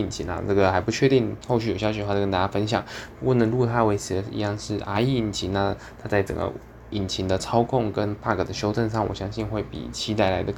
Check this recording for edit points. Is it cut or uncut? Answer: uncut